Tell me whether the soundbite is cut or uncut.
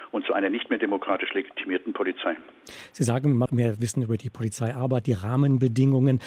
cut